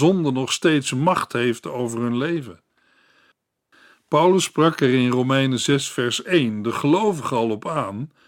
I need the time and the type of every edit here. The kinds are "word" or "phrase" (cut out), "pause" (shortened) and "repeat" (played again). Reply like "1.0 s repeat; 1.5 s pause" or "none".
none